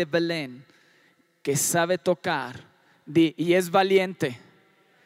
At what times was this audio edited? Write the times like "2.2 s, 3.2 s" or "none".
none

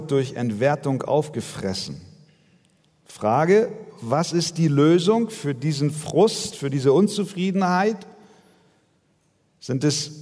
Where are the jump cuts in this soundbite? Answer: none

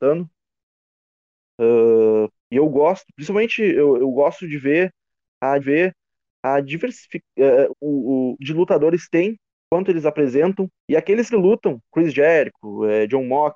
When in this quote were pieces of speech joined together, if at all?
2.4 s, 4.0 s, 5.6 s, 7.7 s, 8.4 s, 9.5 s, 10.8 s, 11.3 s, 11.8 s

